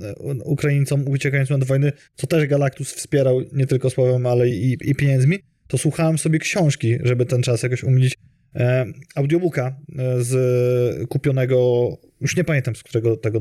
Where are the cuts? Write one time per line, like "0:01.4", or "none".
none